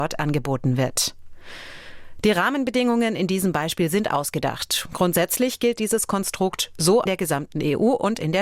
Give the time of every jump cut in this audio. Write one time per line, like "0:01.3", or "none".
0:07.1